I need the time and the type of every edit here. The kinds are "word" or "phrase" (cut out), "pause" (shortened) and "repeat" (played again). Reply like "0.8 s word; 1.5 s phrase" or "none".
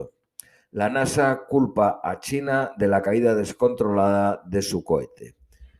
none